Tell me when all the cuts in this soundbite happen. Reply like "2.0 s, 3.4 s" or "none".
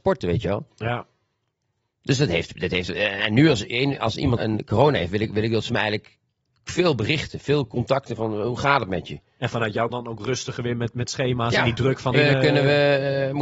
4.4 s, 9.9 s, 12.1 s